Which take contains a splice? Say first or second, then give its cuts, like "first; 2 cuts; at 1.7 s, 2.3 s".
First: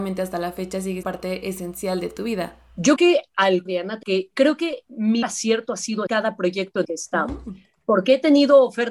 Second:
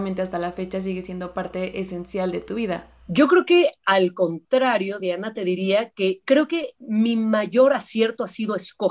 first; 7 cuts; at 1.0 s, 3.0 s, 3.7 s, 4.0 s, 5.2 s, 6.1 s, 6.8 s